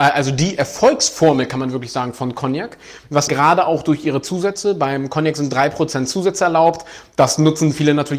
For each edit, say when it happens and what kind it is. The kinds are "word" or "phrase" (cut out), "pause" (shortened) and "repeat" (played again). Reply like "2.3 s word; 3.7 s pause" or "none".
3.3 s phrase